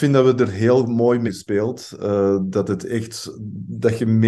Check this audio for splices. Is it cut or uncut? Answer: cut